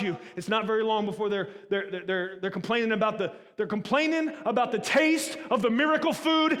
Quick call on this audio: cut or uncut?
uncut